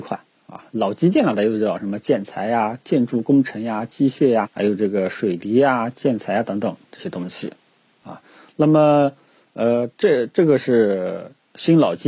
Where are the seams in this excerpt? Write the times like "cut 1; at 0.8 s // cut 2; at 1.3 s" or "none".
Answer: cut 1; at 4.4 s